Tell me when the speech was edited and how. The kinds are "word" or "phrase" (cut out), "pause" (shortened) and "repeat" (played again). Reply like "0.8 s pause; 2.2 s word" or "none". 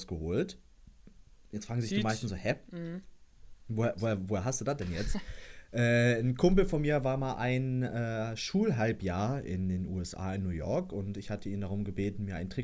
none